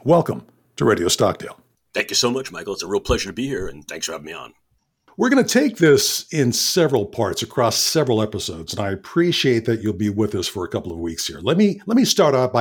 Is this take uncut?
yes; 0 cuts

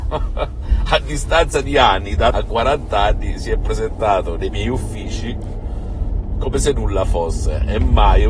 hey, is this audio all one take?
no; 1 cut; at 2.3 s

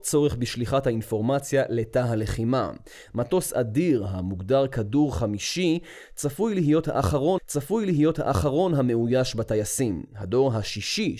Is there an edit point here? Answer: yes; 1 cut; at 7.4 s

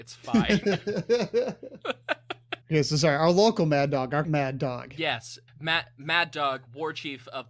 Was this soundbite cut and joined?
yes; 3 cuts; at 2.6 s, 4.2 s, 5.5 s

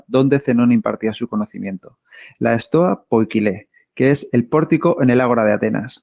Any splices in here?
no; 0 cuts

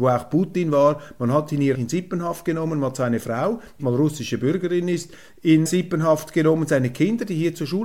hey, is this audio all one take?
no; 3 cuts; at 1.7 s, 3.8 s, 5.7 s

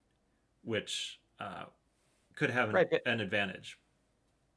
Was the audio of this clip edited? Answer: no; 0 cuts

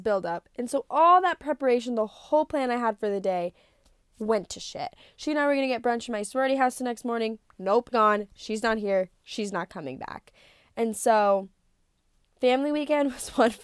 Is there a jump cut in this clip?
yes; 1 cut; at 7.9 s

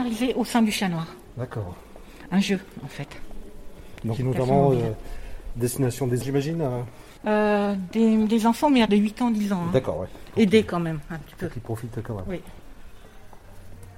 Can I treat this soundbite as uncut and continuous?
no; 4 cuts; at 4.2 s, 6.2 s, 7.2 s, 8.9 s

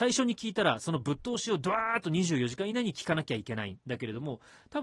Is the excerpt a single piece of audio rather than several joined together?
no; 1 cut; at 3.8 s

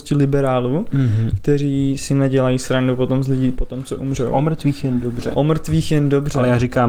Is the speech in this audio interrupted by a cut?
no; 0 cuts

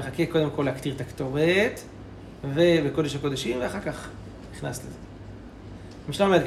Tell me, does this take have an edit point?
no; 0 cuts

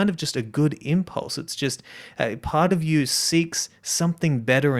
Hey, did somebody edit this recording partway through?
no; 0 cuts

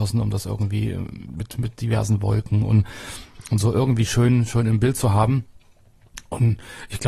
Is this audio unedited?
yes; 0 cuts

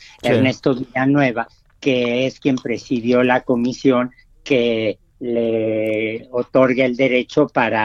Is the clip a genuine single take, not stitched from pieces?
yes; 0 cuts

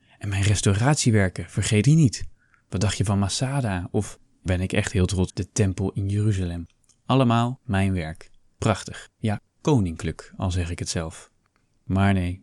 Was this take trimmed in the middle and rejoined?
yes; 3 cuts; at 1.8 s, 4.5 s, 5.3 s

